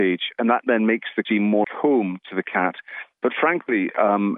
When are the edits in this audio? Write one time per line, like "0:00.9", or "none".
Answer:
0:01.2
0:01.6